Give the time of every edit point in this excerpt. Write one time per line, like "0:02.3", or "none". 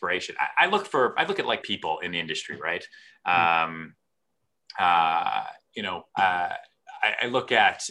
0:01.6
0:06.1